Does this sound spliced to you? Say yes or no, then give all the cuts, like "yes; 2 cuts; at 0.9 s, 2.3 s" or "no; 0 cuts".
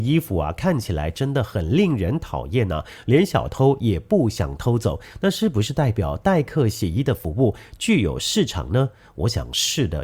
no; 0 cuts